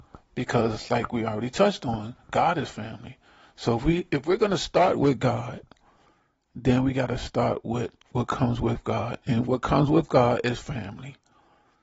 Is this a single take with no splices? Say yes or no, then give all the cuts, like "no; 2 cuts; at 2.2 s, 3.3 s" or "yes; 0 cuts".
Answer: yes; 0 cuts